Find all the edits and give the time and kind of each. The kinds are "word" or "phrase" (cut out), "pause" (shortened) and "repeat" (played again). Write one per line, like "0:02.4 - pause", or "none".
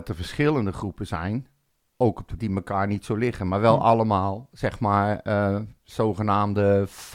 0:02.4 - word